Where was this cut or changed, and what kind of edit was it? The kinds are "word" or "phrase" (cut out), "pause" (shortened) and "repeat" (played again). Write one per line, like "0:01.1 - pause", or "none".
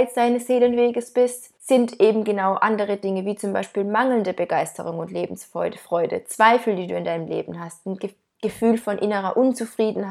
0:01.6 - pause